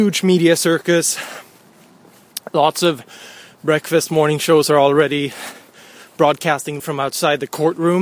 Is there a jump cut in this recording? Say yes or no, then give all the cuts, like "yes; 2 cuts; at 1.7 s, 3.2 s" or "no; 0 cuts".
yes; 1 cut; at 6.8 s